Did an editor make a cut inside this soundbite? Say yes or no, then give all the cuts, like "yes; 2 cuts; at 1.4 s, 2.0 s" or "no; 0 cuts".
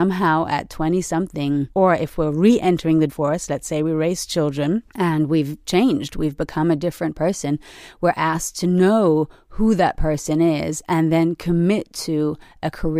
yes; 3 cuts; at 1.7 s, 3.1 s, 4.9 s